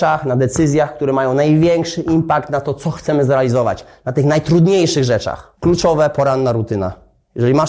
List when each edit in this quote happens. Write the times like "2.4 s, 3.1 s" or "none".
5.6 s